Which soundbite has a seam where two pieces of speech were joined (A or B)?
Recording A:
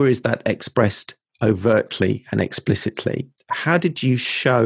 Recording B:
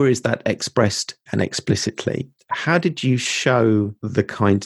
B